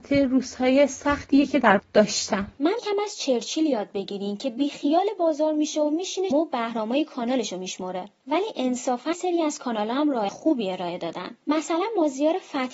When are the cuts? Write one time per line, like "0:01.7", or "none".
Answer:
0:01.8
0:02.8
0:06.3
0:09.1
0:10.3